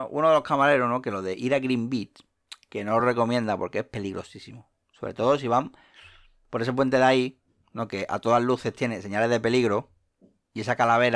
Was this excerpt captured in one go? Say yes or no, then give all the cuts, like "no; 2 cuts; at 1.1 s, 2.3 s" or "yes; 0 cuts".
yes; 0 cuts